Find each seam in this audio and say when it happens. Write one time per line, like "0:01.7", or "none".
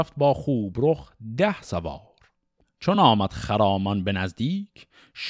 none